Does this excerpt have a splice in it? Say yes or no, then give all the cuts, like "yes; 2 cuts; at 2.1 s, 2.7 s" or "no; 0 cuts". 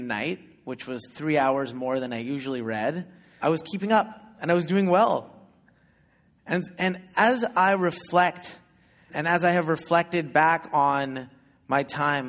yes; 2 cuts; at 3.4 s, 9.1 s